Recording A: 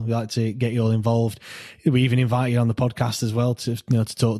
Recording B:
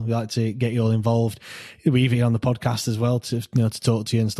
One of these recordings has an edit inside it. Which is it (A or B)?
B